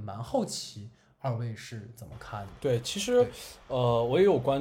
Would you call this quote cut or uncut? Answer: uncut